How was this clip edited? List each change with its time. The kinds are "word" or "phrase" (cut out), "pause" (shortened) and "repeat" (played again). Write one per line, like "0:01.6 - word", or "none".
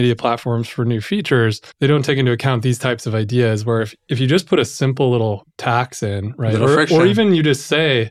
0:01.7 - pause